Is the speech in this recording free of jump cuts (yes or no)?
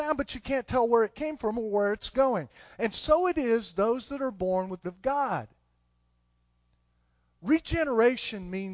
no